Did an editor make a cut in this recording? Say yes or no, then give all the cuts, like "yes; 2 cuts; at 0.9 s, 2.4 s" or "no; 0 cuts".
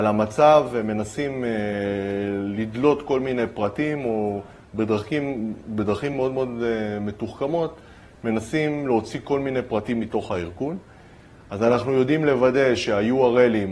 no; 0 cuts